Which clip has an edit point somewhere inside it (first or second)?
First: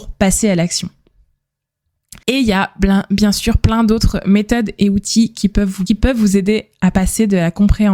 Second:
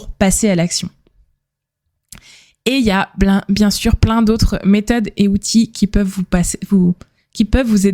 first